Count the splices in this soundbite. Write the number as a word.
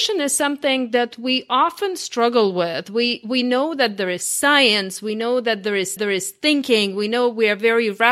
one